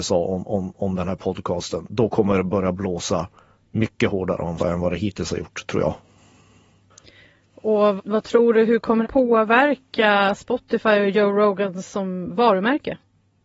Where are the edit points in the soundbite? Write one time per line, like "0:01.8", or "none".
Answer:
0:04.6
0:08.0
0:09.0